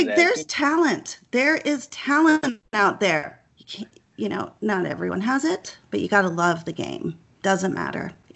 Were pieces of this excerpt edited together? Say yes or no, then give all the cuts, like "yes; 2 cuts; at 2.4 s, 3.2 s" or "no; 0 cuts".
yes; 1 cut; at 3.5 s